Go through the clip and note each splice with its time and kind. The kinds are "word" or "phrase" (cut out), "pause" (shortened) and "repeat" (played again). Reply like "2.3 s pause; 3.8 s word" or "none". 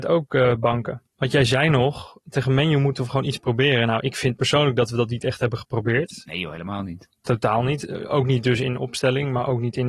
1.1 s pause; 7.2 s pause